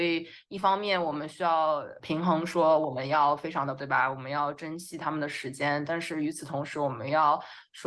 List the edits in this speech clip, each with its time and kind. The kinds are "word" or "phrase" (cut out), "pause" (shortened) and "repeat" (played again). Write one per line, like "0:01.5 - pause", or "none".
0:03.8 - word